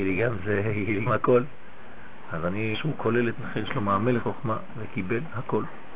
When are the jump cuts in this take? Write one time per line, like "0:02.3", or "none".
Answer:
0:01.1
0:02.7
0:03.4
0:04.2